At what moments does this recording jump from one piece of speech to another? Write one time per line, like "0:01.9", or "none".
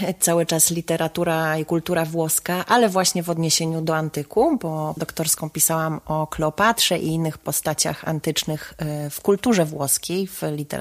0:05.0